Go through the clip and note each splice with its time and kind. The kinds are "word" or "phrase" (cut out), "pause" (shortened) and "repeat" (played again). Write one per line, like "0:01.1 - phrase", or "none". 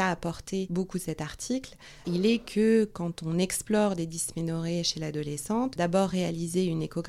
none